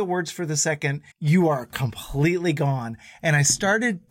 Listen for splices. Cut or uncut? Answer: cut